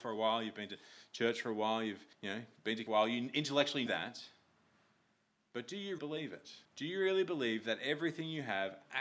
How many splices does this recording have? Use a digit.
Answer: 5